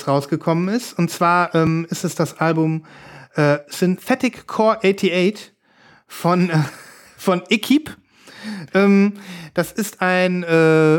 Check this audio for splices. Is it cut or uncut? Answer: uncut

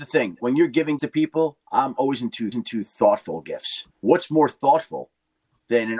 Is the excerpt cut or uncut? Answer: cut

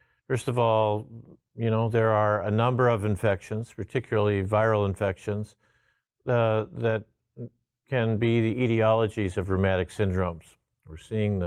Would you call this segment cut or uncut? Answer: uncut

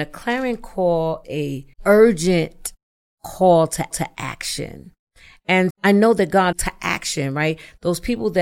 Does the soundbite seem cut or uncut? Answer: cut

